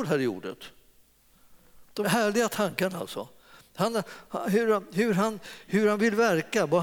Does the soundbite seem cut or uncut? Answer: cut